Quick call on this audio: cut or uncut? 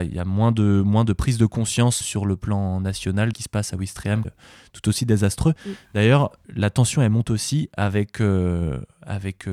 cut